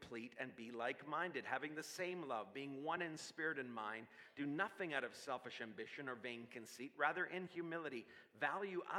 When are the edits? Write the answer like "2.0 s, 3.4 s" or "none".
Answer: none